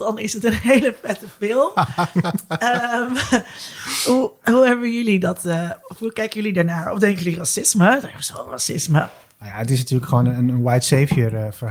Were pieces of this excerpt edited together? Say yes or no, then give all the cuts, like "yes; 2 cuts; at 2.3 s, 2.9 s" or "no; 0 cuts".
no; 0 cuts